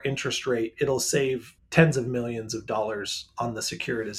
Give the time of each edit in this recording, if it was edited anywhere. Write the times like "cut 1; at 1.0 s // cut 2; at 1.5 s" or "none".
cut 1; at 1.6 s